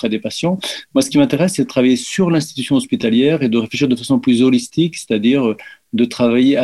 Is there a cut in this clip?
no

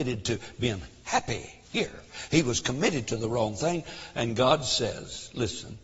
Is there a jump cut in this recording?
no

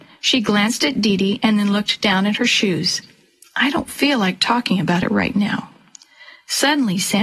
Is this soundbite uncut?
yes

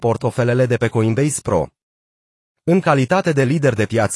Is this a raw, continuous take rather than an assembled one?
yes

